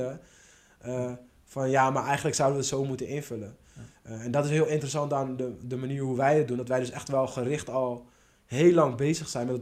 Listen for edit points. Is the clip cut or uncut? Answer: uncut